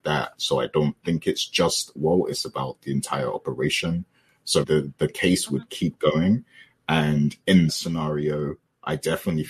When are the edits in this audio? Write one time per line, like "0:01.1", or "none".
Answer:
0:02.0
0:04.6
0:07.7